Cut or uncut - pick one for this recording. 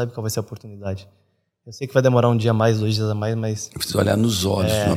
uncut